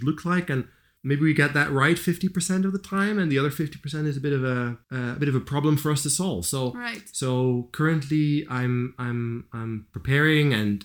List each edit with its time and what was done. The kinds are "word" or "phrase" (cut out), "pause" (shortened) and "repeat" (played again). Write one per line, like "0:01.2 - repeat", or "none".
0:04.8 - pause